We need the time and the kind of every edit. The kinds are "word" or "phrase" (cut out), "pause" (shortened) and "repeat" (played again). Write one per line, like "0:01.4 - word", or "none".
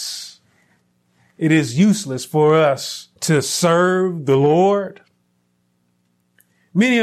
0:03.2 - pause